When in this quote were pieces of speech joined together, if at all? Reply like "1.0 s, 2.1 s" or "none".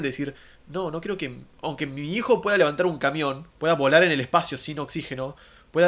3.5 s